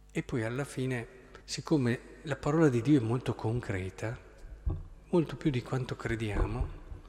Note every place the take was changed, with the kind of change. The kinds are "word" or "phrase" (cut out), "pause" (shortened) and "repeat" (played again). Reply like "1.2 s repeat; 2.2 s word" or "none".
1.4 s pause